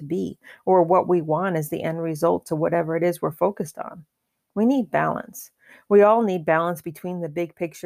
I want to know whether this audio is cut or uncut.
uncut